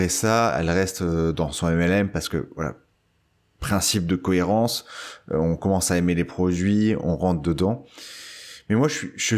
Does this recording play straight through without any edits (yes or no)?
yes